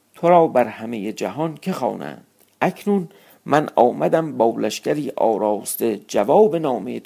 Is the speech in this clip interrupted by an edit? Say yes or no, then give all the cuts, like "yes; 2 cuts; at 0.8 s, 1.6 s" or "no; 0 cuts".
no; 0 cuts